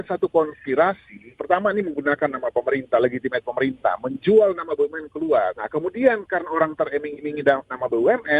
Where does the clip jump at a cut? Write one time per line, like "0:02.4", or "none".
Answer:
none